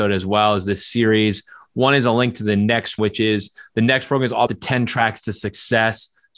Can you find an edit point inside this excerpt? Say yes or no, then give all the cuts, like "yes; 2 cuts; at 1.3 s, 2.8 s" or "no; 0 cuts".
yes; 2 cuts; at 3.0 s, 4.5 s